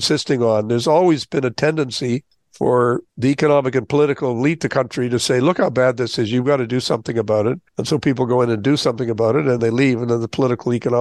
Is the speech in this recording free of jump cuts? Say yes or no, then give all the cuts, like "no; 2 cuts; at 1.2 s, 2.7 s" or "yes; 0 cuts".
no; 2 cuts; at 7.7 s, 9.6 s